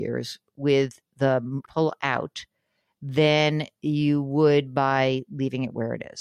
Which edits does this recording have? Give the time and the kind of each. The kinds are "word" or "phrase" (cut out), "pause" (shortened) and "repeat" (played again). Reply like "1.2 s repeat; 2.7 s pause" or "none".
1.7 s phrase